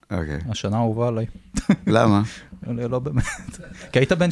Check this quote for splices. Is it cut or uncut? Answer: uncut